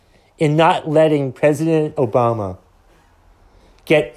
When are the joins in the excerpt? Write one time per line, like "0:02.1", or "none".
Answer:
none